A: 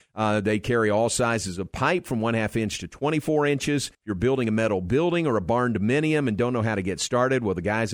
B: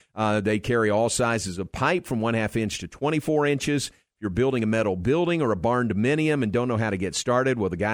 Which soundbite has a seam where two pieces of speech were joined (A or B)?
A